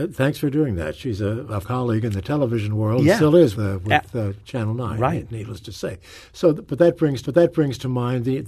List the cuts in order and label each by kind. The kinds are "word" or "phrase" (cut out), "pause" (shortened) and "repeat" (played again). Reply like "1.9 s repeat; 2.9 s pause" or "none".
1.6 s word; 3.5 s word; 7.2 s repeat